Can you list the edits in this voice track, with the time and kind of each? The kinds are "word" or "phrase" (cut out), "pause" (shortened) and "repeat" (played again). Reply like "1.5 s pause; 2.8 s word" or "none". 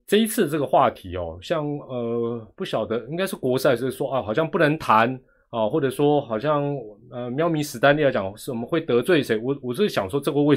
none